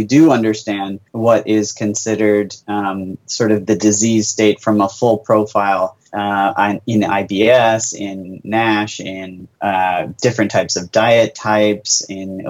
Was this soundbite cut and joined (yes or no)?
yes